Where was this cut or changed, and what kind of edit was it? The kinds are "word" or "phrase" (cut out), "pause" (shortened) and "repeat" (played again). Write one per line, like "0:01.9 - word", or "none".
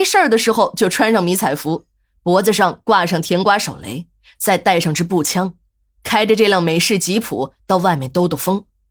none

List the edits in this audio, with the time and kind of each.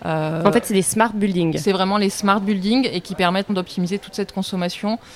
0:03.5 - word

